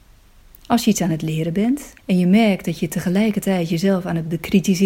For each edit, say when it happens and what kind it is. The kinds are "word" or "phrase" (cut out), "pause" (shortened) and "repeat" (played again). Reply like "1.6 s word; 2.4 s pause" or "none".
2.0 s pause